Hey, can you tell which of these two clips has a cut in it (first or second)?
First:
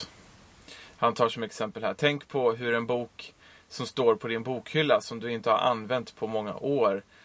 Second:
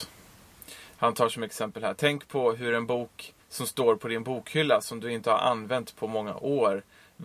second